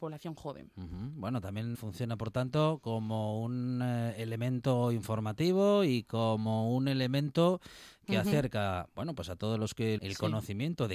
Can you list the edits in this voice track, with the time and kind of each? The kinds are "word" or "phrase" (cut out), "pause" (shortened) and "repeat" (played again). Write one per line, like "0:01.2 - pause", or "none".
0:01.7 - word
0:10.0 - phrase